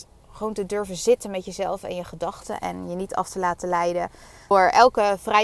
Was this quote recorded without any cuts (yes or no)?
no